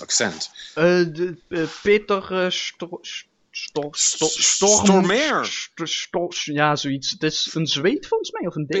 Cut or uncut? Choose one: uncut